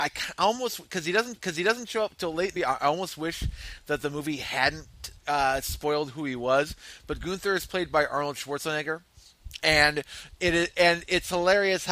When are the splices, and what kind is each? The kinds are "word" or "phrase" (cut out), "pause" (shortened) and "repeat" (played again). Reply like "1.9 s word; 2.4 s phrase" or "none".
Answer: 1.3 s repeat; 2.6 s word; 5.2 s pause